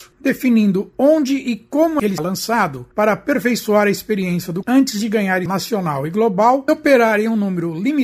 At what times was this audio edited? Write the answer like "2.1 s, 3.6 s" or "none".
2.2 s, 2.9 s, 4.6 s, 5.5 s, 6.7 s